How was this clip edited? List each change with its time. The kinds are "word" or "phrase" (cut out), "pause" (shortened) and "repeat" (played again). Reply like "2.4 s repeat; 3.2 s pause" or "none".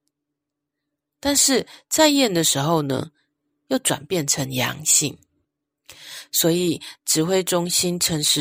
none